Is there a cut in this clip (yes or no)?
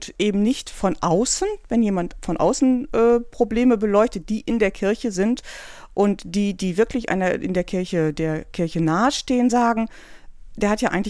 no